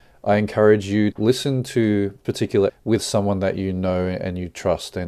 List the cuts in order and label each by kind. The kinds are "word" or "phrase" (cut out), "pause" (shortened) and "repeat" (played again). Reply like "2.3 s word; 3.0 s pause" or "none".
1.1 s word; 2.2 s word; 2.7 s word